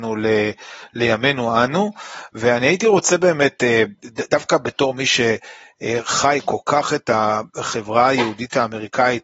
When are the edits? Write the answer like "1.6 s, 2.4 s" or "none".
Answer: none